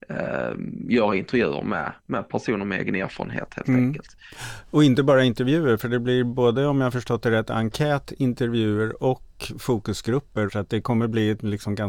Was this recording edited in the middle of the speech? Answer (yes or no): no